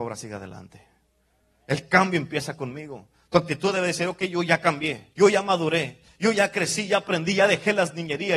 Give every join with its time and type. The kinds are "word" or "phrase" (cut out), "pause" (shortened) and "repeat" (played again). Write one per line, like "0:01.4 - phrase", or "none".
0:05.1 - pause